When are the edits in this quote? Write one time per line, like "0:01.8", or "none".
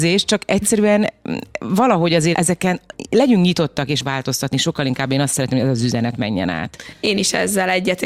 0:02.3
0:04.0